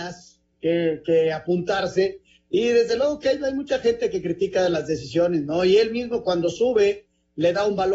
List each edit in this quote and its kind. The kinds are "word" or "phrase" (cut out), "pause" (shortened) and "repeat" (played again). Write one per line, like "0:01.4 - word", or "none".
none